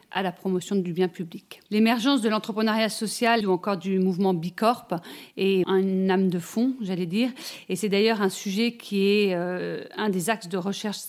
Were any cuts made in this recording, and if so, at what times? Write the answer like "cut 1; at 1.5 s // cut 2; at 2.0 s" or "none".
cut 1; at 1.7 s // cut 2; at 3.4 s // cut 3; at 5.6 s